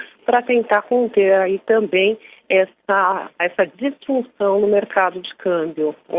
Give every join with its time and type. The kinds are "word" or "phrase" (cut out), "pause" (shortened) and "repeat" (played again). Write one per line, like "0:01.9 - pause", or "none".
0:03.4 - word